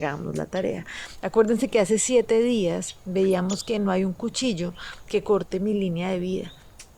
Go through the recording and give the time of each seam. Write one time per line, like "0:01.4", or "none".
none